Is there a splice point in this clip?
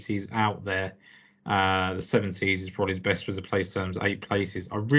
no; 0 cuts

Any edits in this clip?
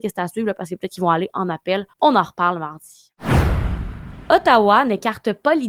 yes; 1 cut; at 1.9 s

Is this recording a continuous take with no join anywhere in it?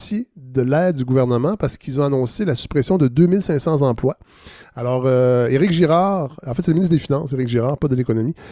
yes; 0 cuts

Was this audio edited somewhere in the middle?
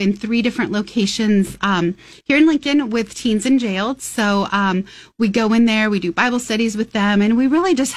no; 0 cuts

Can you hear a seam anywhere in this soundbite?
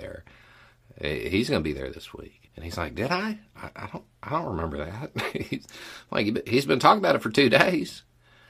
yes; 1 cut; at 2.5 s

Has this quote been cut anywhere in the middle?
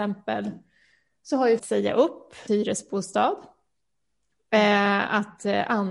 yes; 2 cuts; at 1.6 s, 2.5 s

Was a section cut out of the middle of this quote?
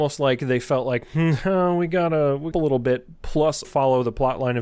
yes; 2 cuts; at 2.5 s, 3.6 s

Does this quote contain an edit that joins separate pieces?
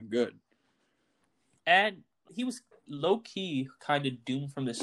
yes; 2 cuts; at 1.2 s, 2.3 s

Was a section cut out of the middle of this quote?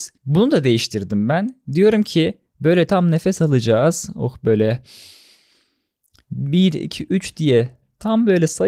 no; 0 cuts

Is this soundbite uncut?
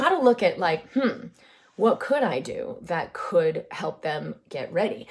yes; 0 cuts

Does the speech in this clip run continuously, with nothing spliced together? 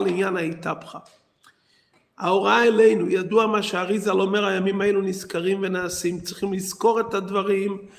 yes; 0 cuts

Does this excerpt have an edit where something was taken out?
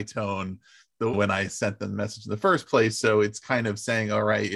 no; 0 cuts

